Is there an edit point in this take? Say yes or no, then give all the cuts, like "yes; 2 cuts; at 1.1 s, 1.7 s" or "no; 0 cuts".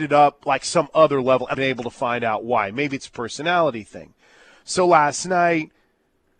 yes; 1 cut; at 1.5 s